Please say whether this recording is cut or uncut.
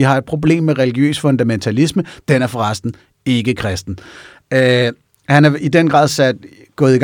uncut